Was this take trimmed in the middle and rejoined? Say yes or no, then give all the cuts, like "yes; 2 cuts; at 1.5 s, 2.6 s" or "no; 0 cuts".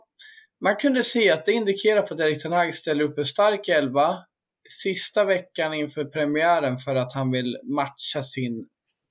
no; 0 cuts